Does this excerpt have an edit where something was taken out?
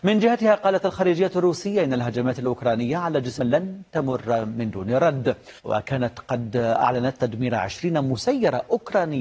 yes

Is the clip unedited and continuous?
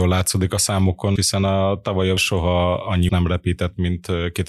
no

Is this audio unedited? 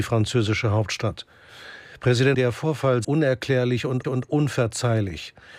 no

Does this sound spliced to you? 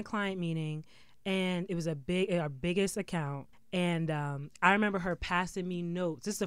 yes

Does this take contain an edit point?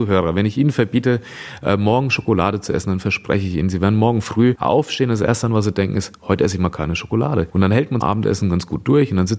yes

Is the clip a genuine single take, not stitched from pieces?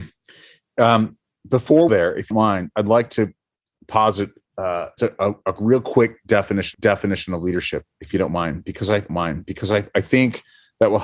no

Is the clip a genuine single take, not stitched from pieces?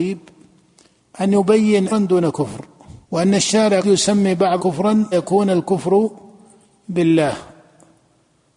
no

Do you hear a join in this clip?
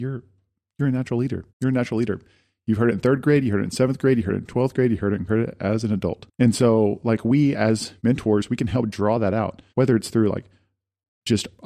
yes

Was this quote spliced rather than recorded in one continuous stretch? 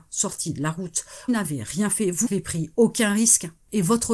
yes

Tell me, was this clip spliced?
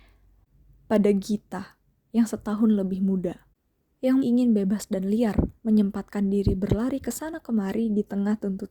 yes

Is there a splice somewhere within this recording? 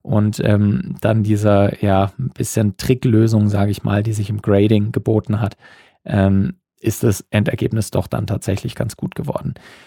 no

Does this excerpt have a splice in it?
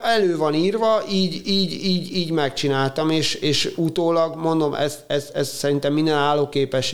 no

